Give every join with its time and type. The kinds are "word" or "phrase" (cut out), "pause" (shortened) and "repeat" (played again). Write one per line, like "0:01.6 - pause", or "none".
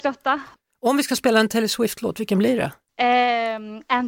none